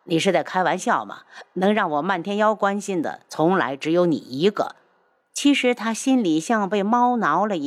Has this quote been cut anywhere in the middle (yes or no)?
no